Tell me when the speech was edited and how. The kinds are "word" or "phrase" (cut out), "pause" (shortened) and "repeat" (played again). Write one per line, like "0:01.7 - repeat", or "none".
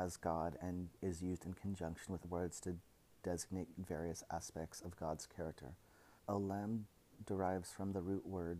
0:02.2 - word
0:06.2 - pause